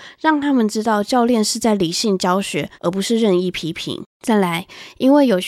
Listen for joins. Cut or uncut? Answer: cut